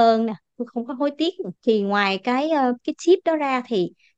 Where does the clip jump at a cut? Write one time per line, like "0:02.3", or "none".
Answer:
0:01.6

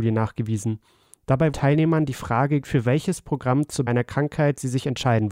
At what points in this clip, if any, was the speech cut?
0:01.5
0:02.6
0:03.9

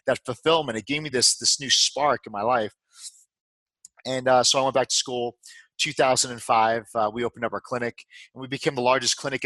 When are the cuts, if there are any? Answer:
none

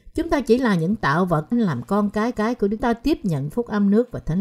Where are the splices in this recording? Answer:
0:01.5
0:02.3
0:02.8

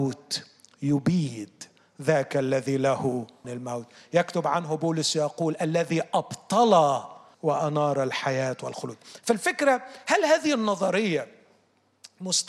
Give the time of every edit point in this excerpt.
0:03.4
0:07.3

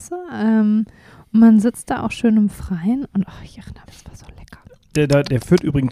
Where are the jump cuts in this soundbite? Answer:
0:03.9

